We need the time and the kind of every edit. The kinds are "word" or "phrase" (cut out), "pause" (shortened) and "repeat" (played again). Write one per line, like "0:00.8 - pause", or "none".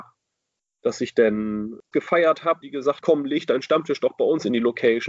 0:01.9 - word
0:02.6 - word
0:03.0 - word